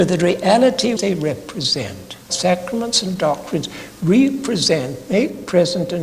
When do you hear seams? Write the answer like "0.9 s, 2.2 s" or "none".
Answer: 1.0 s, 2.2 s